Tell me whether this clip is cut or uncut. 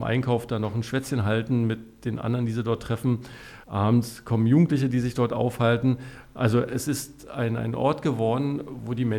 cut